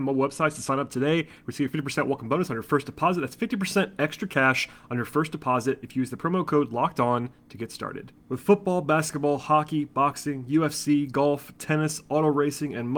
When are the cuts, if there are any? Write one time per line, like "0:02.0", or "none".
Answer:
0:08.2